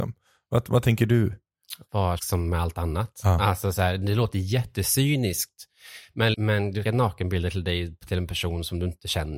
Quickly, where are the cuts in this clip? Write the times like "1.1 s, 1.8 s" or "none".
2.2 s, 6.3 s, 6.8 s